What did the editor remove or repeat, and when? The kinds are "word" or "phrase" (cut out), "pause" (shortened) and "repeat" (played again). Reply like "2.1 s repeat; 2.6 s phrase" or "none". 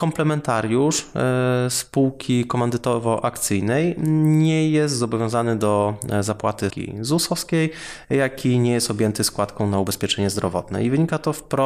6.7 s word